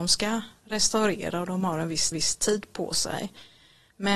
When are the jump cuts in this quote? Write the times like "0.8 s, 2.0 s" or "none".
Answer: 2.1 s